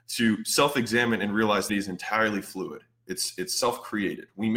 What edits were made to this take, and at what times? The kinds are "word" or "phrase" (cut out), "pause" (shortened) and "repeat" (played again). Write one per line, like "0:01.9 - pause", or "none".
0:01.7 - phrase